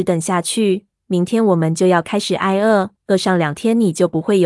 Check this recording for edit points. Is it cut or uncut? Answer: cut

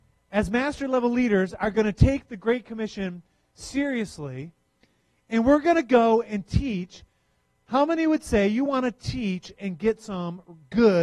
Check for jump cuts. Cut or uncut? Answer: uncut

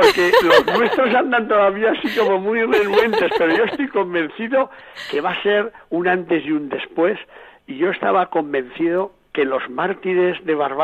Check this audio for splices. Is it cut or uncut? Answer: uncut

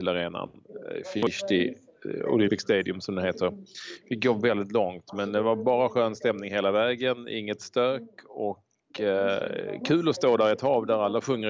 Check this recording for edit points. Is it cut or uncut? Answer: uncut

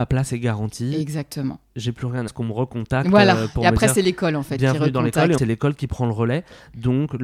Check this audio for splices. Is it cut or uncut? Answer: cut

